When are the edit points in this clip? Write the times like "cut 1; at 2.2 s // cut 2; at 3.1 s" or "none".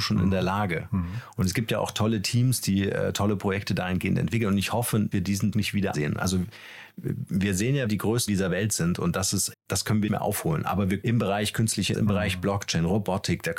cut 1; at 5.1 s // cut 2; at 5.5 s // cut 3; at 5.9 s // cut 4; at 7.9 s // cut 5; at 8.3 s // cut 6; at 9.5 s // cut 7; at 10.1 s // cut 8; at 11.0 s // cut 9; at 11.9 s